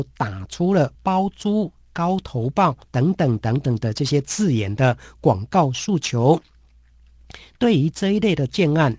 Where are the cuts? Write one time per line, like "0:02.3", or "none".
0:00.9
0:02.8